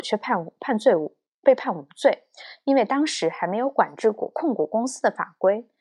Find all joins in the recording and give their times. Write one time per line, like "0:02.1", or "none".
none